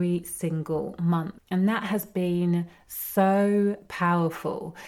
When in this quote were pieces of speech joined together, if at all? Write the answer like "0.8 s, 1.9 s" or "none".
none